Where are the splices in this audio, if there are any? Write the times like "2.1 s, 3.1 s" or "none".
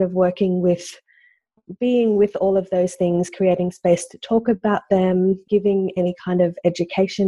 5.5 s